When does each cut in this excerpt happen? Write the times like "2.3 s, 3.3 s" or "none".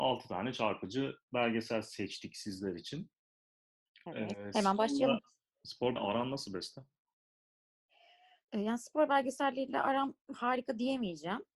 4.3 s, 6.0 s